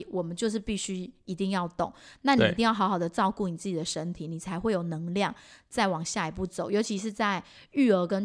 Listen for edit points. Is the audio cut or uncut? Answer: uncut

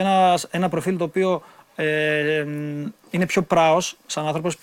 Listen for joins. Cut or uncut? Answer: uncut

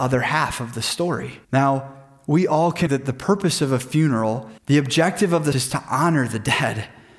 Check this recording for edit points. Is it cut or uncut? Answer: cut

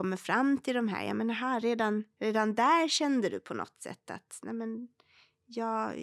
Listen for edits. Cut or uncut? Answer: uncut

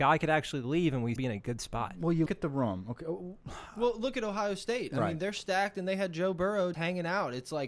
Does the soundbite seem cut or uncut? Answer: cut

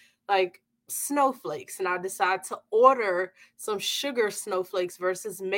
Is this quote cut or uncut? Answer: uncut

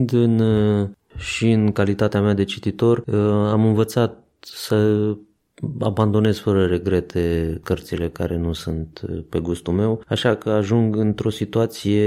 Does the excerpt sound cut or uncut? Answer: uncut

